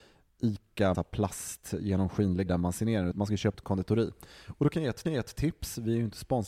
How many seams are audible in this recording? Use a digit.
5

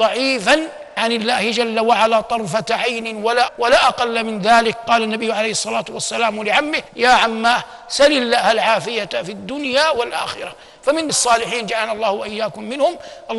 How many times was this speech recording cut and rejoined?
4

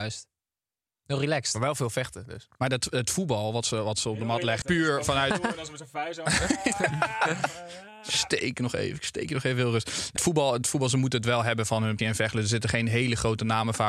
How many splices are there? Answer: 3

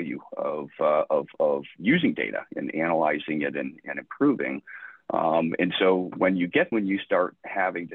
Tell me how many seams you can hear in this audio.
1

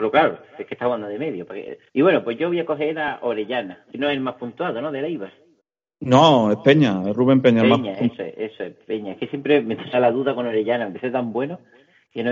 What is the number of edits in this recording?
4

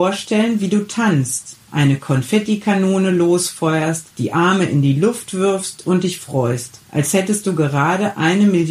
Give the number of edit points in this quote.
3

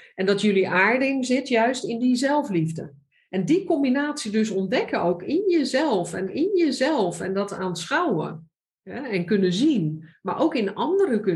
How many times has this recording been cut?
1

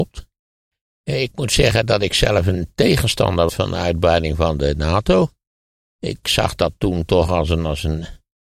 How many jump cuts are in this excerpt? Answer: 2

